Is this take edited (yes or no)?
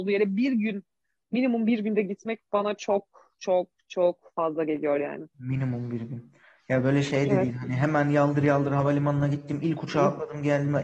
no